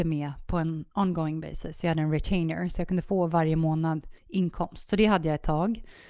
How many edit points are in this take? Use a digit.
1